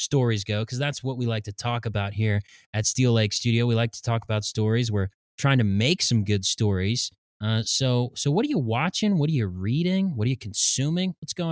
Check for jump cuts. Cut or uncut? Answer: uncut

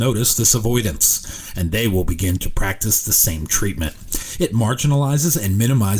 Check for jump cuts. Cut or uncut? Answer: uncut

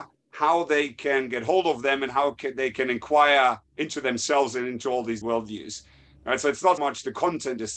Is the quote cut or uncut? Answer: cut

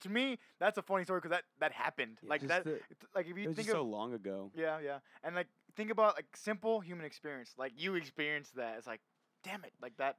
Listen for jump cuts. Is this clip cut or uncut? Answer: uncut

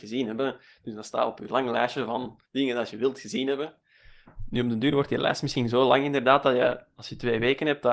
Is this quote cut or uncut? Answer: cut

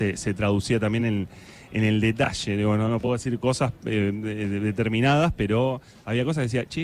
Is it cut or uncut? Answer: uncut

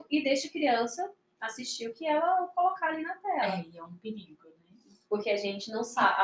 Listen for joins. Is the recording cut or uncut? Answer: uncut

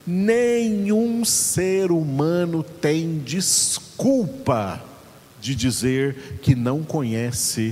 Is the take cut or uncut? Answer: uncut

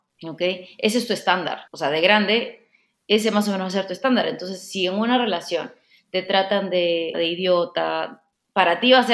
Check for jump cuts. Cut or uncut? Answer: cut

